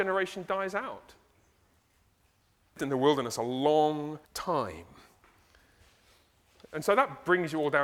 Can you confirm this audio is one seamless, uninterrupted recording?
no; 2 cuts; at 2.8 s, 4.2 s

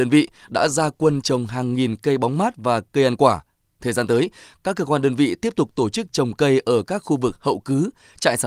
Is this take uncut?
yes; 0 cuts

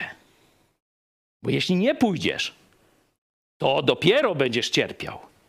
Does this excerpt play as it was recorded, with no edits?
yes; 0 cuts

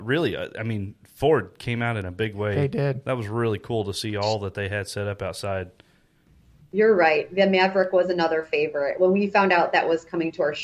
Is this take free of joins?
yes; 0 cuts

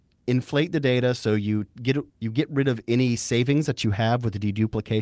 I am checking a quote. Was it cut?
yes; 1 cut; at 2.1 s

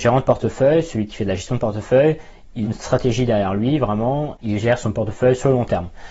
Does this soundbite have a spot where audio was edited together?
yes; 2 cuts; at 2.6 s, 4.4 s

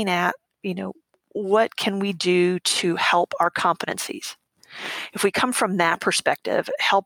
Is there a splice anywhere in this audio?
no; 0 cuts

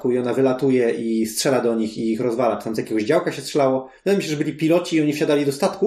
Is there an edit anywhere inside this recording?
no; 0 cuts

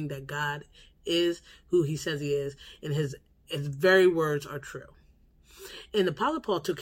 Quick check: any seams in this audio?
no; 0 cuts

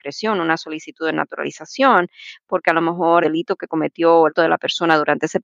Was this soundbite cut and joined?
yes; 2 cuts; at 3.2 s, 4.3 s

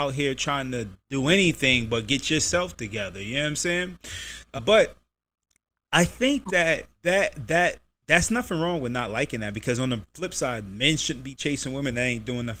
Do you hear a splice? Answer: yes; 2 cuts; at 4.6 s, 6.9 s

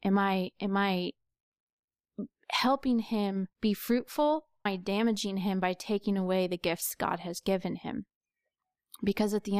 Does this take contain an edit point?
yes; 2 cuts; at 3.5 s, 4.7 s

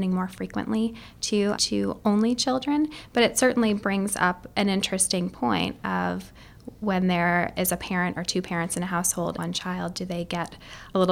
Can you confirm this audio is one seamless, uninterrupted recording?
no; 2 cuts; at 1.6 s, 9.4 s

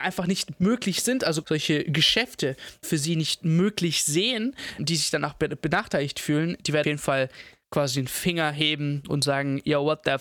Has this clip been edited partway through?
yes; 4 cuts; at 1.4 s, 2.8 s, 4.8 s, 6.8 s

